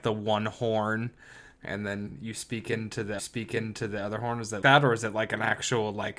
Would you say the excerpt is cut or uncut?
cut